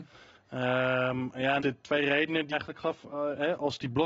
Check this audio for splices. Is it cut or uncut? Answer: cut